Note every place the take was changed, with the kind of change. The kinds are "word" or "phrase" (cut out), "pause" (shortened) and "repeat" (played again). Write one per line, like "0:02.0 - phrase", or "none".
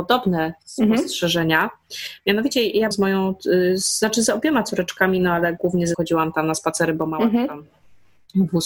0:02.9 - word
0:05.9 - word